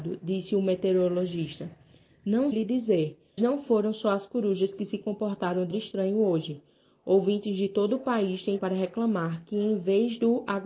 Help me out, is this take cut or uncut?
cut